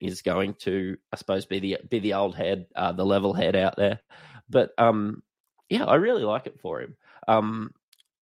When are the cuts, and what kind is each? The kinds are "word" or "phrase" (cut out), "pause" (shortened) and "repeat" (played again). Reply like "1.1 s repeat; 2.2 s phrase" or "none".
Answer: 1.0 s pause